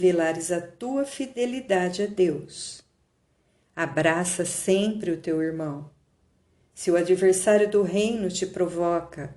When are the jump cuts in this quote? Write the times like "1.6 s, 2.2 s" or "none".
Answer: none